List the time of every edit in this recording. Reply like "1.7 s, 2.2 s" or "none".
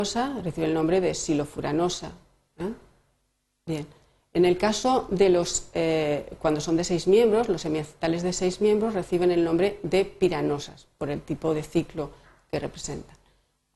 none